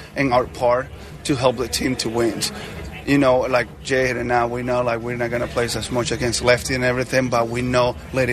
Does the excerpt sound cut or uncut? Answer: uncut